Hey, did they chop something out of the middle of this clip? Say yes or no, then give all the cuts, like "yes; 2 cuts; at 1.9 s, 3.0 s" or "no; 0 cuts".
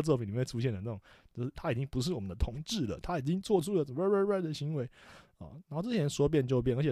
no; 0 cuts